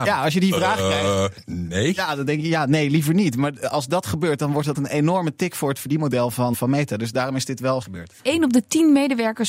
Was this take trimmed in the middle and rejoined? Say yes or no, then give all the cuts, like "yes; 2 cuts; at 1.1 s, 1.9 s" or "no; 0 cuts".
yes; 4 cuts; at 4.7 s, 6.5 s, 7.8 s, 8.2 s